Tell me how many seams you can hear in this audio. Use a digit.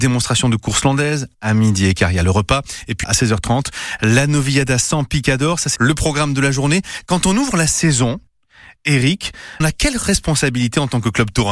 3